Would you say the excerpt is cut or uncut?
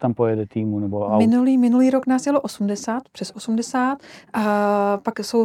uncut